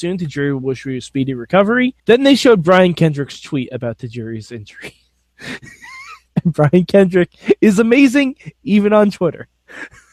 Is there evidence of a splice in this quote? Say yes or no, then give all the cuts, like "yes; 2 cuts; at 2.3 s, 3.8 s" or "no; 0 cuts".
yes; 1 cut; at 2.0 s